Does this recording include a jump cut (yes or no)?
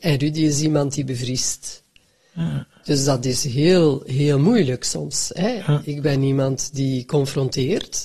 no